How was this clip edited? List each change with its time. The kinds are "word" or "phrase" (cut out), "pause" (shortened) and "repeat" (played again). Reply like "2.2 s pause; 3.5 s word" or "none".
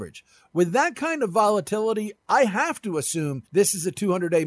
3.5 s pause